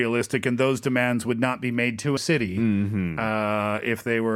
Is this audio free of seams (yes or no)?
no